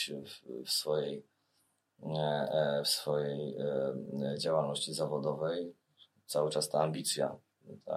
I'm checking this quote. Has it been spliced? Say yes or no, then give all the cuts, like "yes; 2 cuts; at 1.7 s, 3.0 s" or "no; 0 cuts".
no; 0 cuts